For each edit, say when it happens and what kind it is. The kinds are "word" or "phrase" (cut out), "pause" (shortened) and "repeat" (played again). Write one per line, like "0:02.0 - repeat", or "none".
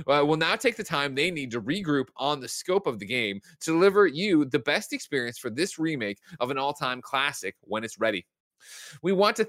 none